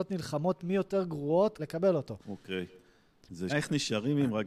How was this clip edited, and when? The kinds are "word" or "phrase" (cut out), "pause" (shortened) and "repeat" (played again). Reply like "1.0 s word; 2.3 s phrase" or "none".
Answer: 1.6 s word; 2.2 s pause; 3.5 s word